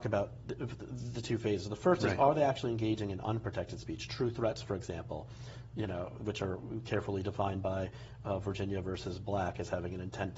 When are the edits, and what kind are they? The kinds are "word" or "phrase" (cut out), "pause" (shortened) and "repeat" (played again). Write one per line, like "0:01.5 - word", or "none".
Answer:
none